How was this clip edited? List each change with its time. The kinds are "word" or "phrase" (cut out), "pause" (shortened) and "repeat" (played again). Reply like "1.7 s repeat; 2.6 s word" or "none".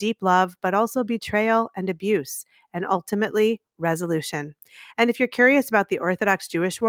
none